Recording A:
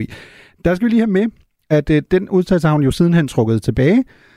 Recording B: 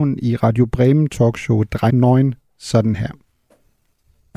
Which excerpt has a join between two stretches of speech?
B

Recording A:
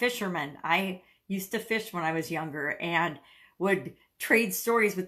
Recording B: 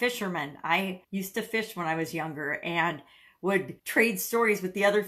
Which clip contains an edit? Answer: B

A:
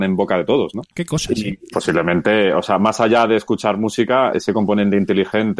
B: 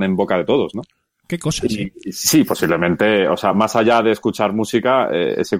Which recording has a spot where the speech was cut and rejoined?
A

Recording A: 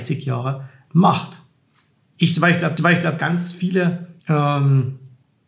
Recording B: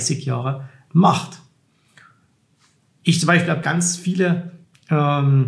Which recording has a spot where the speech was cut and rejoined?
A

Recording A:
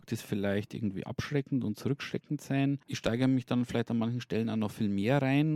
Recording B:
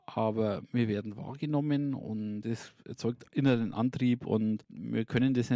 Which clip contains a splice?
B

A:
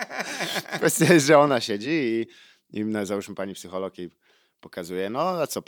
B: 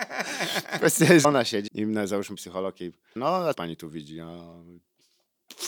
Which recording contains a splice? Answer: B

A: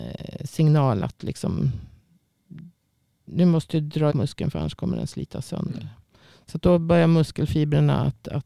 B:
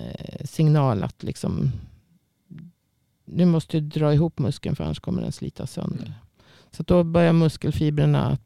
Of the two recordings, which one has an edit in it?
A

